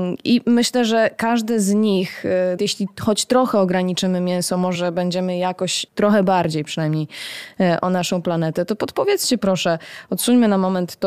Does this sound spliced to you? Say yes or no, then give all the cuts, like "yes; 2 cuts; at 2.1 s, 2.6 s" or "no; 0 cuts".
yes; 3 cuts; at 2.6 s, 4.7 s, 5.9 s